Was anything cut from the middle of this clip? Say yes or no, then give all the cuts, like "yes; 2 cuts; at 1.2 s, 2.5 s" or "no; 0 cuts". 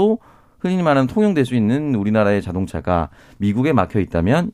no; 0 cuts